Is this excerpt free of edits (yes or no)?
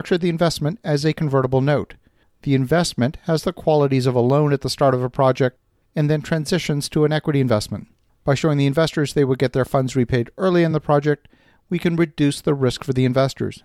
yes